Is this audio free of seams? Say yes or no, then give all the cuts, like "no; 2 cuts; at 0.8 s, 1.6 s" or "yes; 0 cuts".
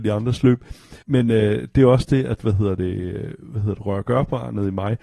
no; 1 cut; at 1.0 s